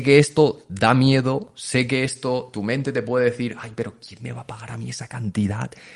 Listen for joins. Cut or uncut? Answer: uncut